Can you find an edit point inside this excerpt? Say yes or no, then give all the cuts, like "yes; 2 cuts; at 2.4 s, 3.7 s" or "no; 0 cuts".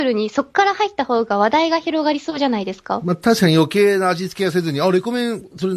no; 0 cuts